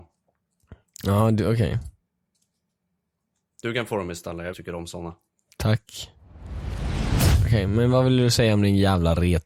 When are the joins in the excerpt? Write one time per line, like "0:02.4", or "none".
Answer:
0:04.5